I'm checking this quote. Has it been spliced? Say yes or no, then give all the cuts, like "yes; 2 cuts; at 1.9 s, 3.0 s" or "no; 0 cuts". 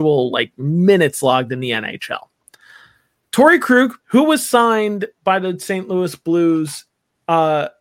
yes; 1 cut; at 4.0 s